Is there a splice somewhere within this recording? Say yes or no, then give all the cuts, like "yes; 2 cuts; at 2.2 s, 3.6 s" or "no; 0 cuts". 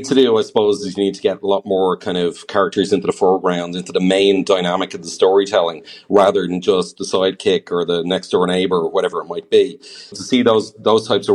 yes; 1 cut; at 10.1 s